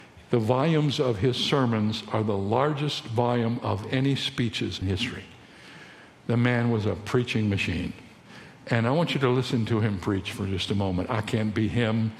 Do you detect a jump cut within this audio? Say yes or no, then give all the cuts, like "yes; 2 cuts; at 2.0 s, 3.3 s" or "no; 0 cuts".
yes; 1 cut; at 4.8 s